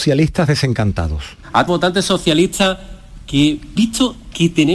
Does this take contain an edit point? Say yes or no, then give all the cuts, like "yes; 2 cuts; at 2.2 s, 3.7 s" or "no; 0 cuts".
yes; 2 cuts; at 1.7 s, 3.8 s